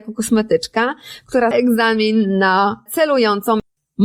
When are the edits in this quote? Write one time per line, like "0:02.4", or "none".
0:01.5
0:02.9